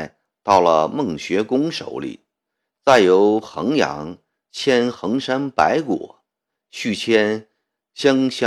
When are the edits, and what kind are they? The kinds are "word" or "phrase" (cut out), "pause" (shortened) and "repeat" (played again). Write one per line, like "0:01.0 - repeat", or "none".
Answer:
none